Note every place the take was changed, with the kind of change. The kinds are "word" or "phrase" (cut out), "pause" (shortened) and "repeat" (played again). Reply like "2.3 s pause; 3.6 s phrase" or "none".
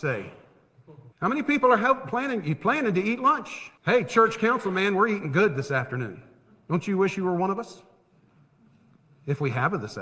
1.1 s pause; 3.8 s pause